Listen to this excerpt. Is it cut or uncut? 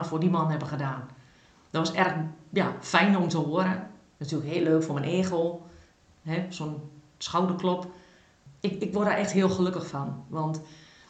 uncut